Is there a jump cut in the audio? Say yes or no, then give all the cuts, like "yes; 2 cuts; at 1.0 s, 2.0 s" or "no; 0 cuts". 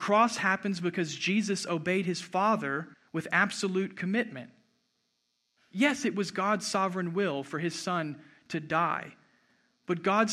yes; 1 cut; at 2.9 s